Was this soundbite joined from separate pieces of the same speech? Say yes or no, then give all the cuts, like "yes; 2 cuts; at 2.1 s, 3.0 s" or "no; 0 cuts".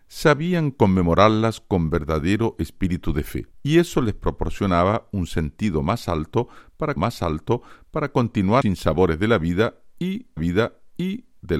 yes; 4 cuts; at 3.5 s, 7.0 s, 8.6 s, 10.4 s